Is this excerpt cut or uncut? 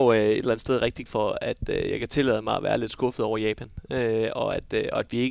cut